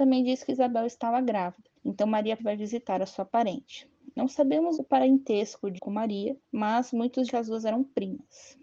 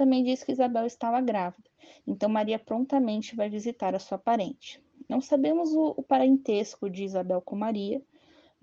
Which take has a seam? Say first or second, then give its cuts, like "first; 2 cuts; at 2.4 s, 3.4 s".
first; 6 cuts; at 1.8 s, 2.4 s, 4.8 s, 5.8 s, 6.4 s, 7.3 s